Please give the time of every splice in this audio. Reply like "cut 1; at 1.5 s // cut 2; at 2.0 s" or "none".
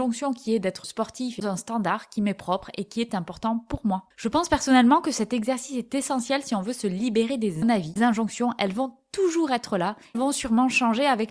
cut 1; at 1.4 s // cut 2; at 7.6 s // cut 3; at 8.0 s // cut 4; at 10.1 s